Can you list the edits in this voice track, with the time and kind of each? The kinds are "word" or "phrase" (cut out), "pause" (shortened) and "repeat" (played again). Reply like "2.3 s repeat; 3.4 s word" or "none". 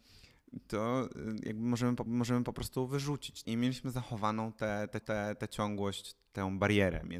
2.1 s repeat; 3.4 s word; 5.0 s repeat